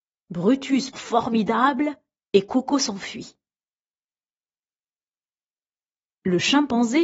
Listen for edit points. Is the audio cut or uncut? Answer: cut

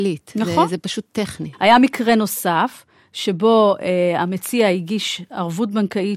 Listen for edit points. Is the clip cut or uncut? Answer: uncut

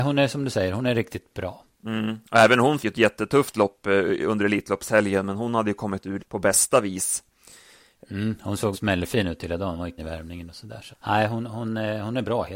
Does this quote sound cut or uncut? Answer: cut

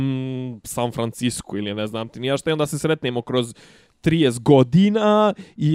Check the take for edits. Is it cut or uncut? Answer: uncut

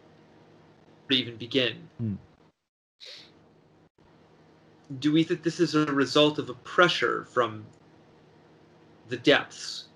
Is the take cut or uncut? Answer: cut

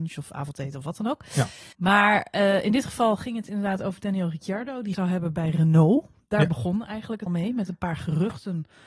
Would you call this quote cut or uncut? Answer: cut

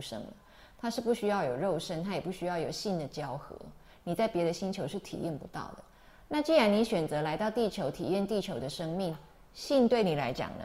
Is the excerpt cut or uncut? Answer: uncut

